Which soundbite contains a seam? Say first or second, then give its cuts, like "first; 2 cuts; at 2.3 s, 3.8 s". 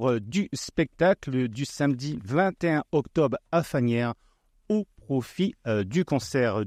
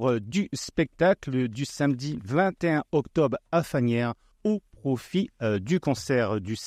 second; 1 cut; at 4.3 s